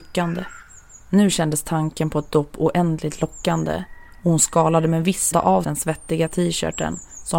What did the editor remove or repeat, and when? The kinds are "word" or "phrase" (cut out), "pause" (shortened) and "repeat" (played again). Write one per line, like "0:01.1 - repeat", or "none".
0:05.3 - word
0:05.6 - word

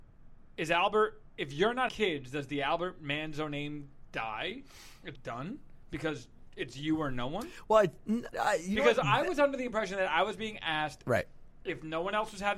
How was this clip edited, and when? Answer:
0:01.9 - word
0:05.1 - word
0:08.3 - word

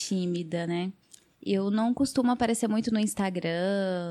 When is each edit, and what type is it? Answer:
none

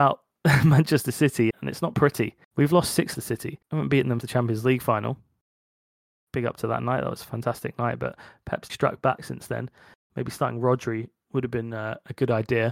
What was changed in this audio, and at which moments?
0:01.5 - word
0:02.4 - pause
0:03.1 - phrase
0:03.6 - pause
0:04.2 - word
0:08.7 - word

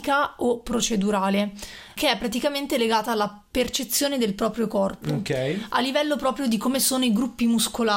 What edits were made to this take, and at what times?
none

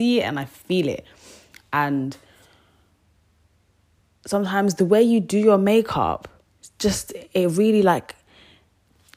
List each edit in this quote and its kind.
none

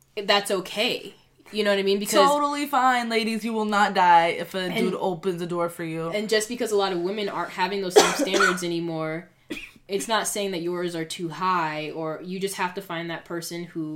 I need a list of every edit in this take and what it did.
none

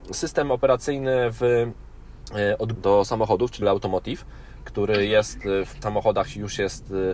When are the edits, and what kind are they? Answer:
0:02.7 - word
0:03.6 - word
0:05.8 - word

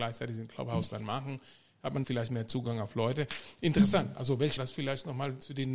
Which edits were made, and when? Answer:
0:02.0 - word
0:04.6 - word

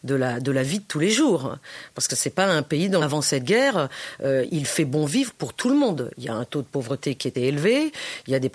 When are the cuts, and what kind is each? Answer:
0:03.0 - phrase
0:04.5 - word
0:07.3 - word

